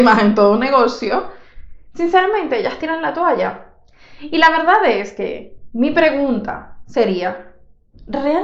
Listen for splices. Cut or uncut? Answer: uncut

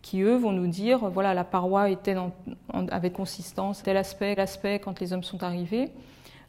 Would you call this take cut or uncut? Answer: cut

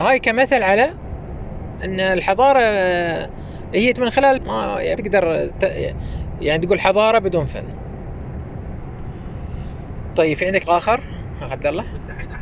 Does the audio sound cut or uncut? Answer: cut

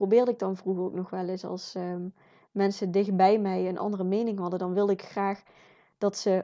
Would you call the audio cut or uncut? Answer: uncut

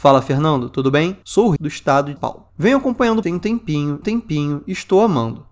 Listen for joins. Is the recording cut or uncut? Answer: cut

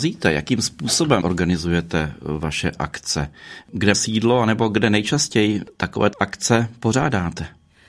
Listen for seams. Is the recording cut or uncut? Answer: cut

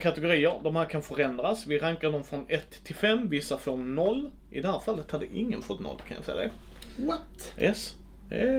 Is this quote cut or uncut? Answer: uncut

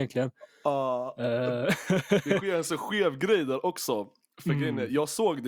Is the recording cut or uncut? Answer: uncut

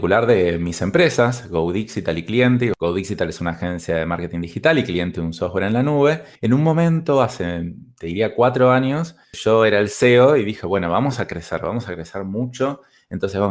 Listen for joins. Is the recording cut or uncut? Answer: cut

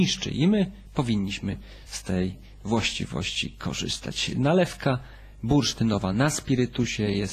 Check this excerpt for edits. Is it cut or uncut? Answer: uncut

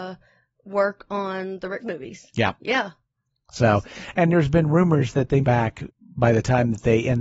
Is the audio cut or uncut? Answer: cut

